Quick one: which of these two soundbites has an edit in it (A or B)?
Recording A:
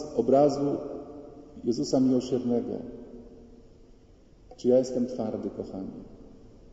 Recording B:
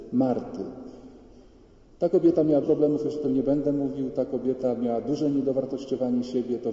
B